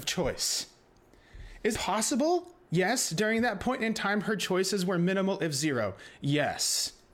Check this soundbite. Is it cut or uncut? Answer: cut